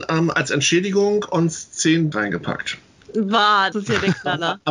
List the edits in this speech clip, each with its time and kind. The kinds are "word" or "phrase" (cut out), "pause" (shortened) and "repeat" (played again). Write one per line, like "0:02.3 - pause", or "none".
0:02.1 - word
0:03.7 - word